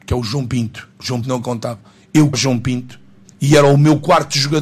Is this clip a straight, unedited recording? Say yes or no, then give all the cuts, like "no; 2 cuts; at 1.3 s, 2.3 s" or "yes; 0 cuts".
no; 4 cuts; at 0.9 s, 1.2 s, 2.3 s, 3.2 s